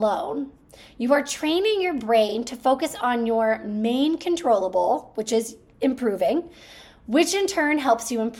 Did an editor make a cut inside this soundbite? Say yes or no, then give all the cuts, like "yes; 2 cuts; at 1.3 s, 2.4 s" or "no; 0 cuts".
no; 0 cuts